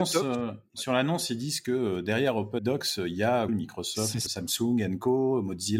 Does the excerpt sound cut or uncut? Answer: cut